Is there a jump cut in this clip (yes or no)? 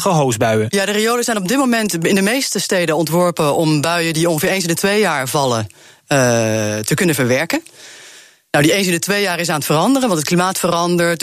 no